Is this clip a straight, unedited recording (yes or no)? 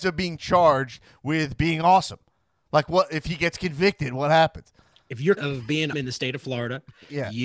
no